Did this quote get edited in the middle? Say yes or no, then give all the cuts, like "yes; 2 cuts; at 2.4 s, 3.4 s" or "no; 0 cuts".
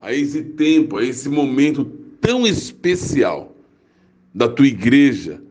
no; 0 cuts